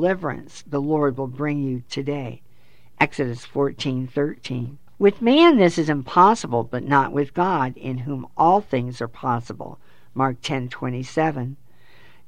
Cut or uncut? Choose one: cut